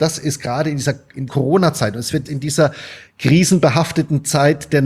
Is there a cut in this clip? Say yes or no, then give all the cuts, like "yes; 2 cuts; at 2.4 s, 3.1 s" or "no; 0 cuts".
yes; 2 cuts; at 1.3 s, 2.3 s